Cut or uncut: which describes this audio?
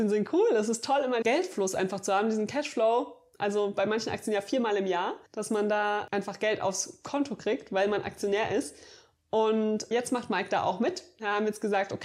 cut